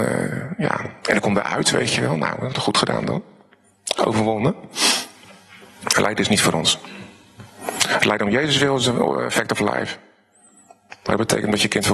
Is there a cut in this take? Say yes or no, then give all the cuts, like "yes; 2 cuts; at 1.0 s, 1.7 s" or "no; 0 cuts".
yes; 1 cut; at 1.0 s